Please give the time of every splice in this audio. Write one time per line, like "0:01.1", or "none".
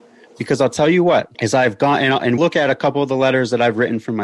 0:01.3
0:02.4